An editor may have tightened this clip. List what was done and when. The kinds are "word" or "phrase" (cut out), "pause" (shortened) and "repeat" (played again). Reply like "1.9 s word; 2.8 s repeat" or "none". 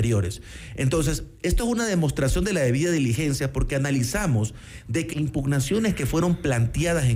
5.1 s word